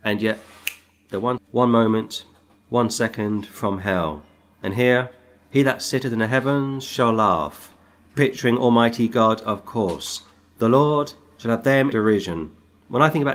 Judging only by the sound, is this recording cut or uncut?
cut